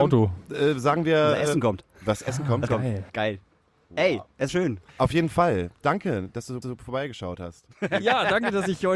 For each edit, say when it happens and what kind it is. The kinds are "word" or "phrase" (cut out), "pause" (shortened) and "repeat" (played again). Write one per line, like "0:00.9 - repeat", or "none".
0:02.7 - word
0:03.1 - pause
0:04.5 - phrase
0:04.9 - pause
0:06.6 - repeat